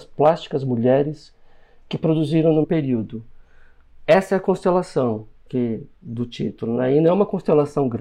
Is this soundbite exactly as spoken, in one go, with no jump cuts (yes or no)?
no